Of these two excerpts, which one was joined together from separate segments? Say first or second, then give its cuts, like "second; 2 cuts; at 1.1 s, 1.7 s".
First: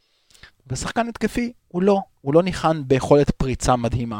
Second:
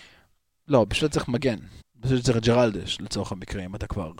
second; 1 cut; at 1.8 s